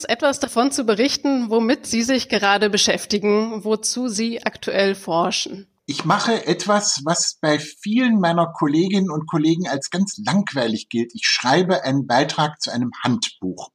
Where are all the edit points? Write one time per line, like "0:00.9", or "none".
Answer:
0:05.8